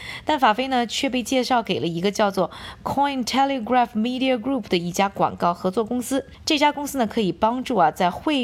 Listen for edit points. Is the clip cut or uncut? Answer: uncut